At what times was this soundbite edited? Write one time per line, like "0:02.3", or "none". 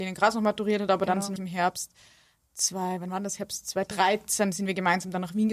0:01.4